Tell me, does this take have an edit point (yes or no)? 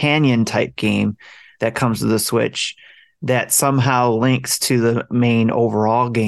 no